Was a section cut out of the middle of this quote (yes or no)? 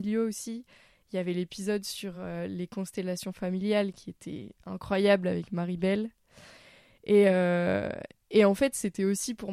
no